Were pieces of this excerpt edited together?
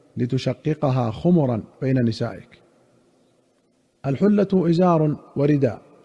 no; 0 cuts

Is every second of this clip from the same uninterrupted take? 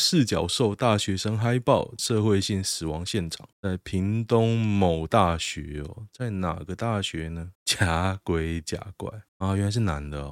no; 4 cuts; at 2.0 s, 3.5 s, 7.5 s, 9.3 s

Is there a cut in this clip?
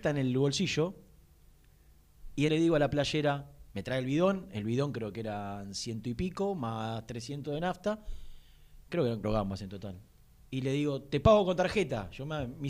yes; 4 cuts; at 2.5 s, 3.7 s, 9.2 s, 10.2 s

